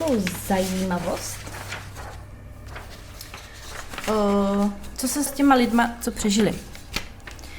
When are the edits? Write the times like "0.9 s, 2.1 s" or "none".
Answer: 5.3 s

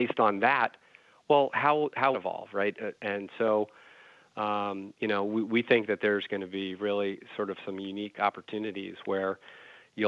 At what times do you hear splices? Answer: 2.1 s

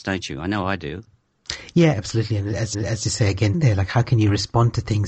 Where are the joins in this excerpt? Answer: 1.9 s, 2.7 s, 3.5 s

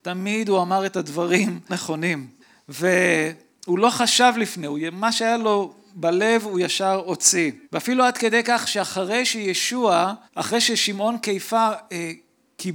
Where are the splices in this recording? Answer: 1.7 s, 2.4 s, 7.6 s, 10.3 s

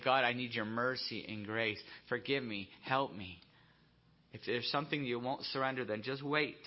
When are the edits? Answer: none

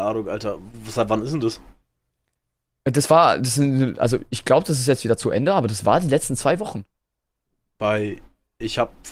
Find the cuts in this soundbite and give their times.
none

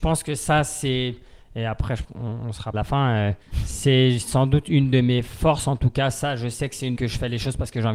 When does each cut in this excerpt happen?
2.0 s, 2.7 s, 3.4 s, 6.9 s

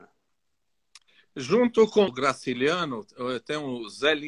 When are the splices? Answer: 2.1 s

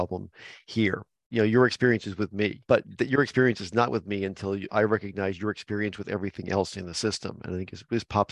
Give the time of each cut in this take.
2.6 s, 4.7 s

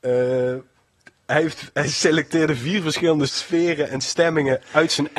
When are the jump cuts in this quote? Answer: 3.3 s

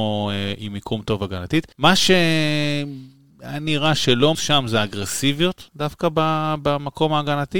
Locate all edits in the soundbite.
1.7 s, 4.3 s

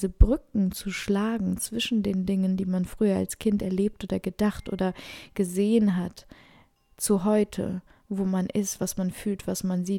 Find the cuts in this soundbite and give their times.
none

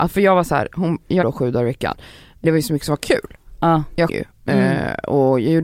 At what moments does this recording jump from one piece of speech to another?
1.2 s, 2.4 s, 4.1 s

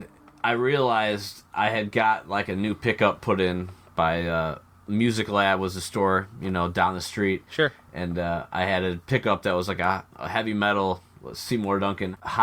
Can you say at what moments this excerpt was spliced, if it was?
none

